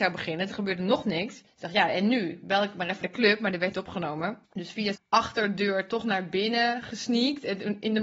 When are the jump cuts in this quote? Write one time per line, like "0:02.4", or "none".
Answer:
0:01.5
0:03.0
0:03.7
0:04.4
0:05.0

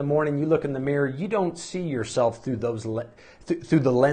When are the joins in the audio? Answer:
none

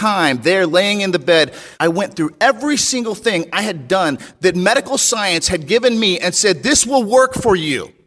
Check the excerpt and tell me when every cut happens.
0:01.7

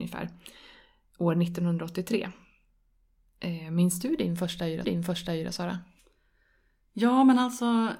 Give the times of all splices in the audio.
0:04.8

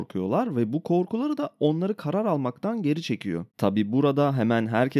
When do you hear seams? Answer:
0:03.5

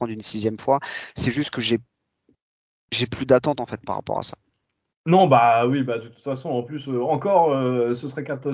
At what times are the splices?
none

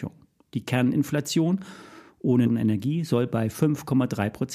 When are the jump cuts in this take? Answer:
0:02.4

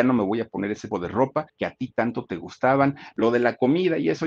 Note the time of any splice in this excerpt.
0:00.9
0:01.5

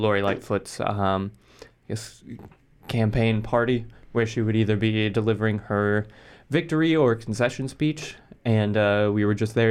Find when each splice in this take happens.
none

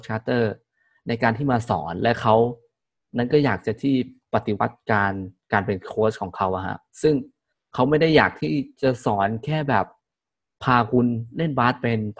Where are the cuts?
none

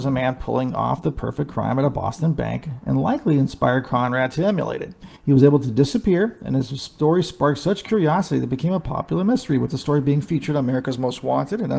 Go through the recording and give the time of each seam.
0:05.2

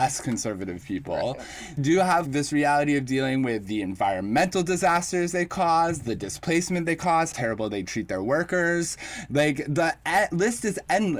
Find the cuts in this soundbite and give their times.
0:01.8
0:02.2
0:07.3

